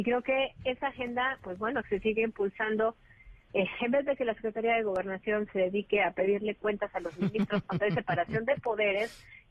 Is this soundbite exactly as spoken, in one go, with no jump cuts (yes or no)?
no